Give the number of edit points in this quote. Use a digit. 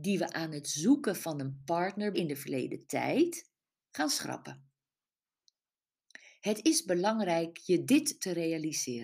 1